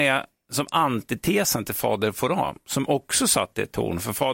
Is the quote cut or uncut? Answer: uncut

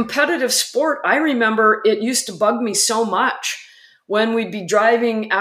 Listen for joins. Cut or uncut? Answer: uncut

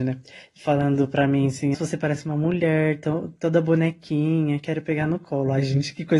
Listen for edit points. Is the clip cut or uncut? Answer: cut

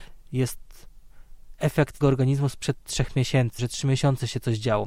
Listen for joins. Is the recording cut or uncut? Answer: cut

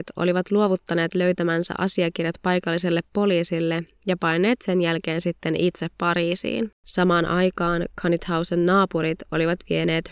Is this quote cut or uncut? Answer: cut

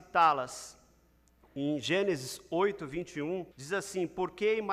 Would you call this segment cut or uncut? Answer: cut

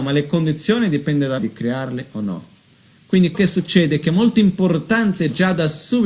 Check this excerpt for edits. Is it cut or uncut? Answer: cut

